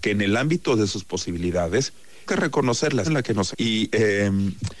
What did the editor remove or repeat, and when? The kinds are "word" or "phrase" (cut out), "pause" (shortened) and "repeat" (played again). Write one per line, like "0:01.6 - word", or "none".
0:02.3 - word
0:03.0 - word
0:03.5 - word